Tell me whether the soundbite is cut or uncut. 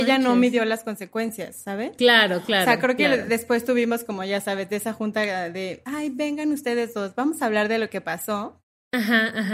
uncut